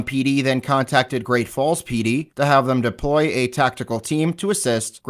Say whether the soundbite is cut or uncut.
uncut